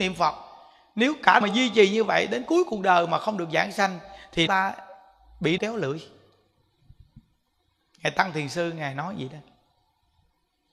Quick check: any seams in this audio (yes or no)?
yes